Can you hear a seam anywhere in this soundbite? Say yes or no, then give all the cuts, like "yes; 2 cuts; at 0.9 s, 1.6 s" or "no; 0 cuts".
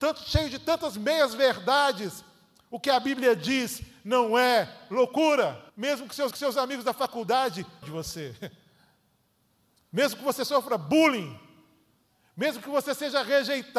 yes; 3 cuts; at 5.7 s, 6.3 s, 7.8 s